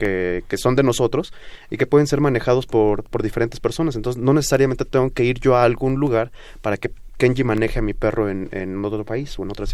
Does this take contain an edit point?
no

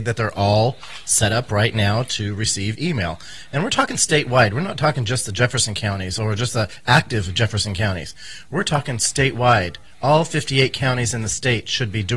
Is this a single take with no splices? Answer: yes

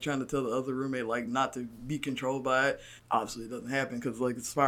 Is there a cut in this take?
yes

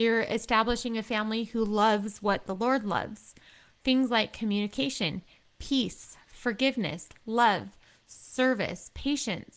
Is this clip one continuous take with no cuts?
yes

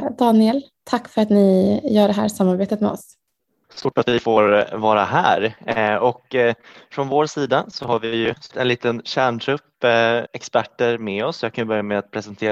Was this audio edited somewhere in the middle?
yes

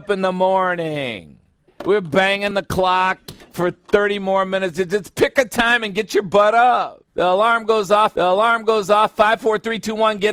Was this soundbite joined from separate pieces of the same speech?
yes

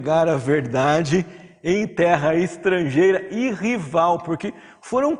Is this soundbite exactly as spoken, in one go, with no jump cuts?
yes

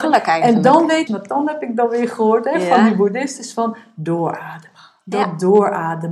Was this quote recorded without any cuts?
no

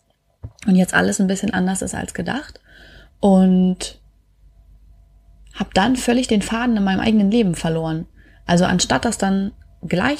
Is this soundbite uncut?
yes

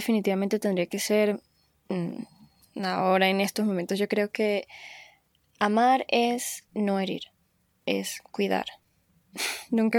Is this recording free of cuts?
yes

